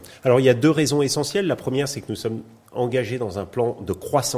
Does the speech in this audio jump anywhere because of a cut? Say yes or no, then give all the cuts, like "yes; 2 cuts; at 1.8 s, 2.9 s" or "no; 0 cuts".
no; 0 cuts